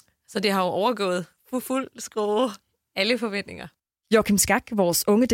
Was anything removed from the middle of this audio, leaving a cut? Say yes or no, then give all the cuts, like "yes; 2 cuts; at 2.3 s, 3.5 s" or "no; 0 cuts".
no; 0 cuts